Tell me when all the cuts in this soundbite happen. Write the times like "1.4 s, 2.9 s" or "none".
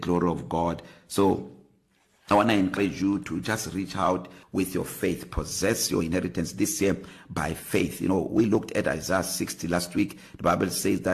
none